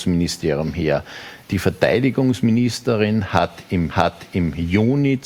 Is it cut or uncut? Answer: cut